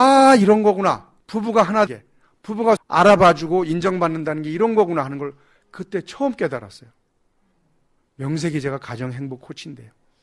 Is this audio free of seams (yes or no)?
no